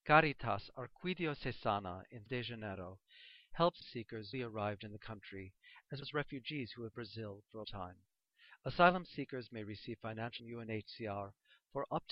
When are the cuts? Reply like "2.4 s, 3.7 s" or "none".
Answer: 2.3 s, 3.8 s, 4.3 s, 6.0 s, 6.9 s, 7.6 s, 10.4 s

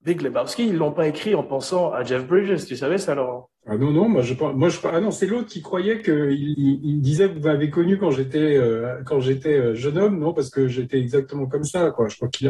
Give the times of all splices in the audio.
3.6 s, 6.5 s

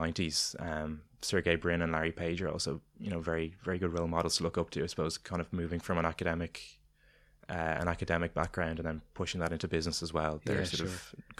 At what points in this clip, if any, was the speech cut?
none

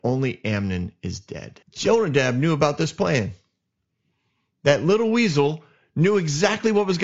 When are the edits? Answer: 1.6 s

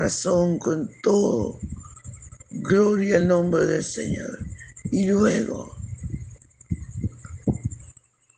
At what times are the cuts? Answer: none

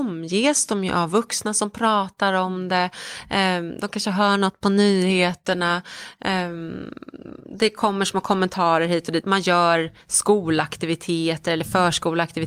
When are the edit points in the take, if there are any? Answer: none

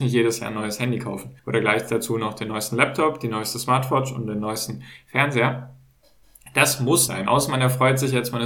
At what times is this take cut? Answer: 1.4 s, 7.1 s

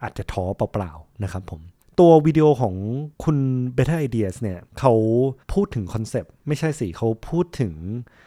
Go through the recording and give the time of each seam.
1.8 s, 3.1 s, 4.7 s, 5.4 s, 6.4 s

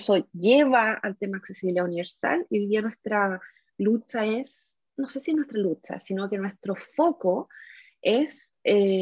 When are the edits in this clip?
none

